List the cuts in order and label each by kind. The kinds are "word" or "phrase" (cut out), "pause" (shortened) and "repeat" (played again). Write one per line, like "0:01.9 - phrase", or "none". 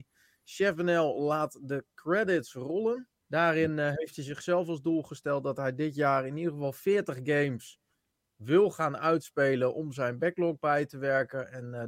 0:03.2 - pause